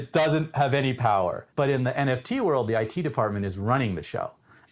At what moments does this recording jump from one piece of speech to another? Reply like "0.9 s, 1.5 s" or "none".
1.5 s